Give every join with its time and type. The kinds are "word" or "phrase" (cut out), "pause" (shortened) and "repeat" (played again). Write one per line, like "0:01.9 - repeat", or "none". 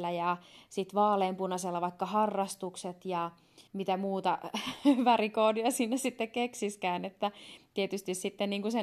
0:03.7 - pause